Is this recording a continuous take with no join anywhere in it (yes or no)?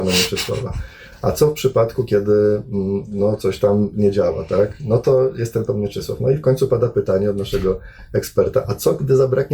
yes